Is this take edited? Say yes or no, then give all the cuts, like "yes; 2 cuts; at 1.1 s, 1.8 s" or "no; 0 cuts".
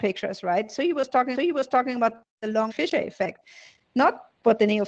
yes; 2 cuts; at 1.4 s, 2.7 s